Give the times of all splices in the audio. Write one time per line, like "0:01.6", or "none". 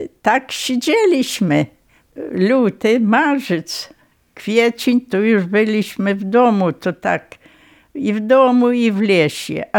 none